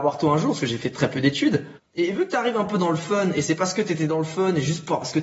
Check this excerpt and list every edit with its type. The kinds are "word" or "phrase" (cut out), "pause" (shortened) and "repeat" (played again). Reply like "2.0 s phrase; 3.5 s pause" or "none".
1.8 s pause